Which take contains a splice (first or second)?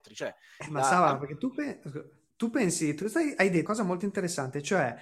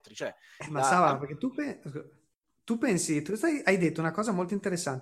first